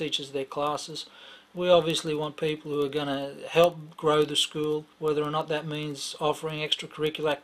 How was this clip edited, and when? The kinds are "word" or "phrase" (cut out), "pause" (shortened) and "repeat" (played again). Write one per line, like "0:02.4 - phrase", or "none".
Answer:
0:04.9 - pause